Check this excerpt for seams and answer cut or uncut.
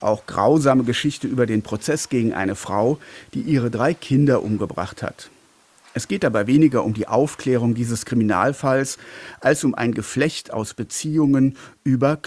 uncut